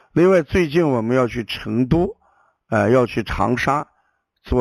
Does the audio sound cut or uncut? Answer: uncut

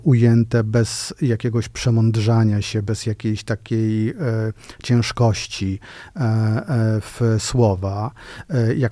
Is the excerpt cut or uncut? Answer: uncut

